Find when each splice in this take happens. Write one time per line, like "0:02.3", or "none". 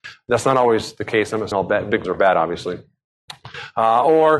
0:01.5
0:02.0